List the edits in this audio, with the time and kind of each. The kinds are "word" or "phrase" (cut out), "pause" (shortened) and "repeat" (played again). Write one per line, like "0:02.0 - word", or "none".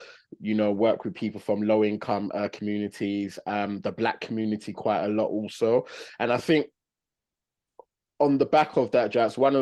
none